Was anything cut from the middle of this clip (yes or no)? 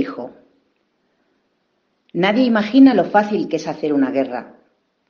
no